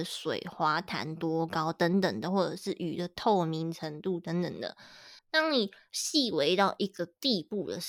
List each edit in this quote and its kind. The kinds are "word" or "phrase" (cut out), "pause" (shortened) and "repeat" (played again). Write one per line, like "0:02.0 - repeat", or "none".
0:05.2 - pause